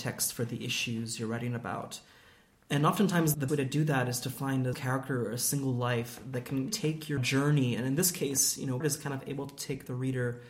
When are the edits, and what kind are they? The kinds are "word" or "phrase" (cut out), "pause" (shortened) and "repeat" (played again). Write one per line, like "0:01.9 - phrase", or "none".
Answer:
0:03.5 - word
0:04.7 - word
0:06.7 - word
0:07.2 - phrase
0:08.8 - word